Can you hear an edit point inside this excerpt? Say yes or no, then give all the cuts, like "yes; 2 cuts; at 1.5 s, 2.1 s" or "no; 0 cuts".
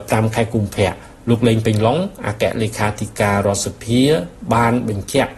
no; 0 cuts